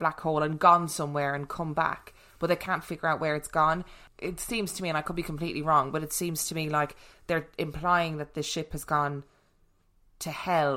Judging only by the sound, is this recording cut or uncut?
uncut